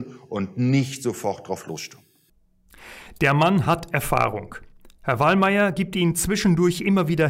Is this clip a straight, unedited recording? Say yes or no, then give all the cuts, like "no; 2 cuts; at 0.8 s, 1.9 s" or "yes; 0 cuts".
yes; 0 cuts